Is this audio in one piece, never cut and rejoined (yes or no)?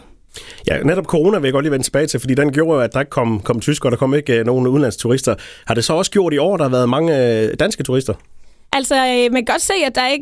yes